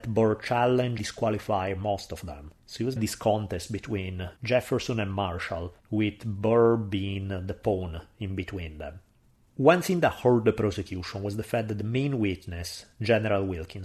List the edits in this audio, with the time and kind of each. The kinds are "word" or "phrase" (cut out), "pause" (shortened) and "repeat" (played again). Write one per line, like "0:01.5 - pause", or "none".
0:01.0 - word
0:02.6 - pause
0:03.0 - word
0:04.4 - pause
0:05.8 - pause
0:09.2 - pause